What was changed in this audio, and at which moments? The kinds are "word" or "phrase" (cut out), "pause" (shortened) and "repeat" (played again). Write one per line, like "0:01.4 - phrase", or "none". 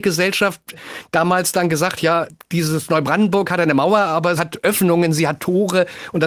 0:02.0 - word
0:04.4 - word